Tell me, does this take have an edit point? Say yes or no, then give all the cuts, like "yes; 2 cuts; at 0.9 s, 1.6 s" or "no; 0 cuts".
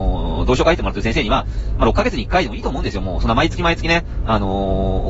yes; 1 cut; at 1.8 s